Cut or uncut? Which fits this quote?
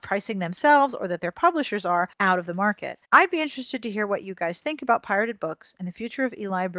cut